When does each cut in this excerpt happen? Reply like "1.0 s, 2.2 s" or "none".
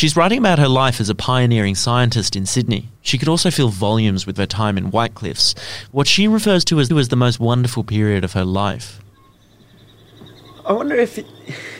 3.0 s, 4.4 s, 6.9 s